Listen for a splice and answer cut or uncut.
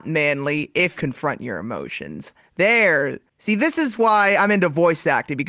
cut